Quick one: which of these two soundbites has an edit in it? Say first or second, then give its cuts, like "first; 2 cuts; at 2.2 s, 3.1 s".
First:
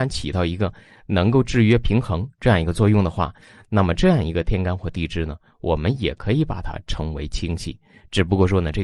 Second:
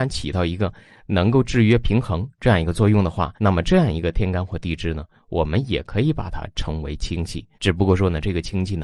second; 2 cuts; at 3.4 s, 7.5 s